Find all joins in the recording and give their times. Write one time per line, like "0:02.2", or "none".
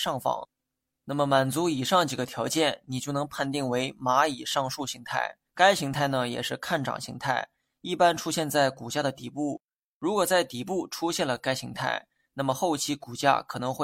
0:05.5